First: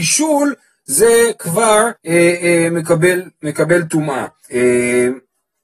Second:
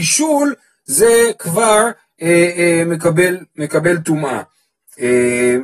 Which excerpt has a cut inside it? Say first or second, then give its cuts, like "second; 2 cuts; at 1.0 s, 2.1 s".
first; 2 cuts; at 2.0 s, 4.4 s